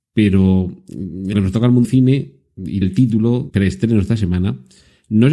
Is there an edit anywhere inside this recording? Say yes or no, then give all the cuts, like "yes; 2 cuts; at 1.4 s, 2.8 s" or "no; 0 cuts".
yes; 4 cuts; at 1.3 s, 1.8 s, 2.8 s, 3.5 s